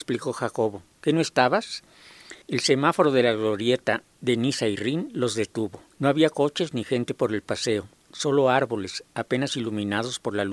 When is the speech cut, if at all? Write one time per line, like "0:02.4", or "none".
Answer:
0:02.4
0:05.9